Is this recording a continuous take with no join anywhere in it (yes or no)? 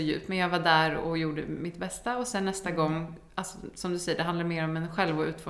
yes